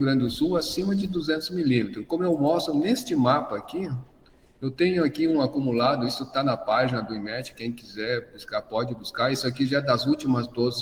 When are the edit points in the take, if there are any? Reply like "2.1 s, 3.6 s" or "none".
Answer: none